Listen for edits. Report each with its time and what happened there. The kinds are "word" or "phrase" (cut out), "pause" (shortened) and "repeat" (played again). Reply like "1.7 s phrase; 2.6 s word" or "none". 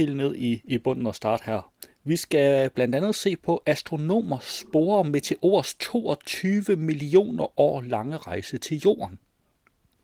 none